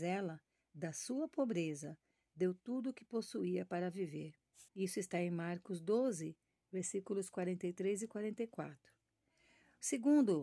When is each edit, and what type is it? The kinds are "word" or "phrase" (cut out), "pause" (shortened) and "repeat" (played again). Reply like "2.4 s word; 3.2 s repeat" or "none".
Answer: 4.7 s pause